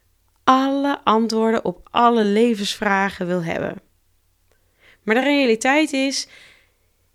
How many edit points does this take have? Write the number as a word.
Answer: zero